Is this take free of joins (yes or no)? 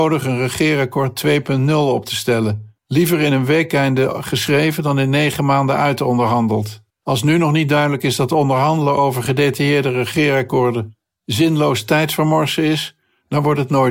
no